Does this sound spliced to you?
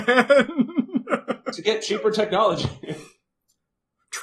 no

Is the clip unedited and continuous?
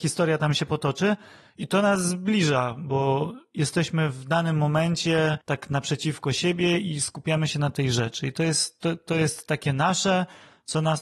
yes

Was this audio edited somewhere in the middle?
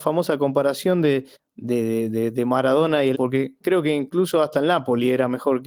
yes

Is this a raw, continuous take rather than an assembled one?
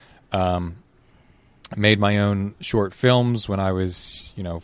yes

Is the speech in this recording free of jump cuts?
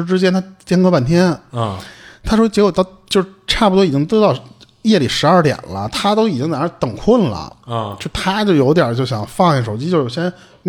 yes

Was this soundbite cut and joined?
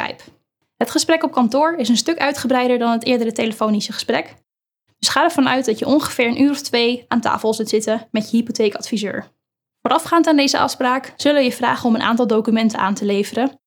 no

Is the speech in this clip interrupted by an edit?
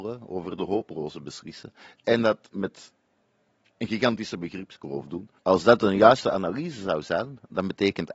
yes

